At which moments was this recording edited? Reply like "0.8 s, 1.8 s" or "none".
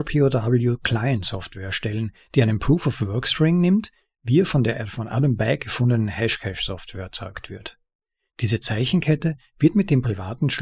none